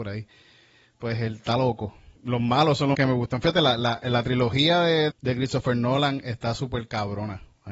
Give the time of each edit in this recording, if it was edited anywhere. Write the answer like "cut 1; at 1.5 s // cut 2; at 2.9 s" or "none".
cut 1; at 2.2 s // cut 2; at 2.9 s // cut 3; at 5.1 s